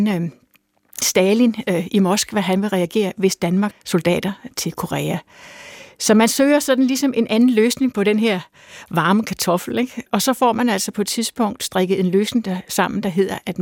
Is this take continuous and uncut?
no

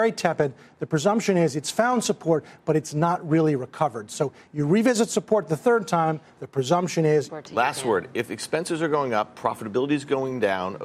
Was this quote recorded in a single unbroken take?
no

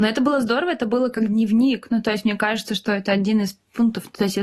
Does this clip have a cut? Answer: no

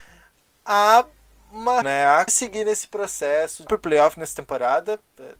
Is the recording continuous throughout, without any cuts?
no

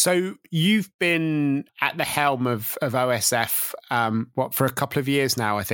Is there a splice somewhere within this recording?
no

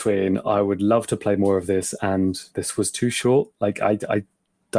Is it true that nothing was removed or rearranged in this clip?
no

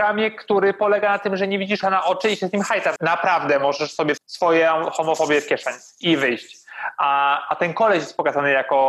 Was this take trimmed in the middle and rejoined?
yes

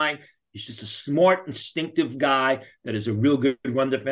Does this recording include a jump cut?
no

